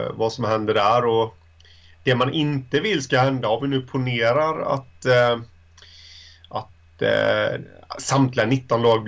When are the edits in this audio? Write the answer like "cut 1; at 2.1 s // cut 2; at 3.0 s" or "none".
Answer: none